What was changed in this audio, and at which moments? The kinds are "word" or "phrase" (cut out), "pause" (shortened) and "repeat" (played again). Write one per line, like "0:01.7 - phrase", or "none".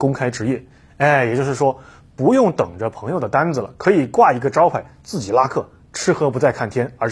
none